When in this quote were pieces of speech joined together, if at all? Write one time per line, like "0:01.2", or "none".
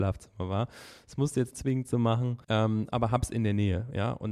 0:01.5
0:02.4